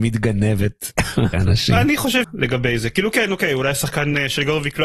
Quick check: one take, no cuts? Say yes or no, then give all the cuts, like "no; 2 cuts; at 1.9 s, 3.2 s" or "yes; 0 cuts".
no; 2 cuts; at 1.3 s, 2.2 s